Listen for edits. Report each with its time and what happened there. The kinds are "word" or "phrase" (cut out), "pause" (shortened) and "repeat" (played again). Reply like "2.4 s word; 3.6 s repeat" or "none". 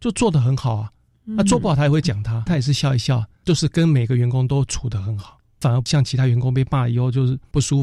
2.5 s word